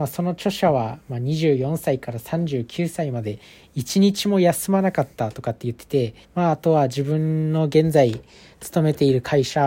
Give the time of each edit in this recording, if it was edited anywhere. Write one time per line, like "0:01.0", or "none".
0:06.2